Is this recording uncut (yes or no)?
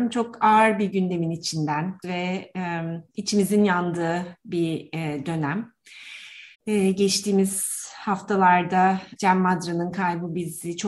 no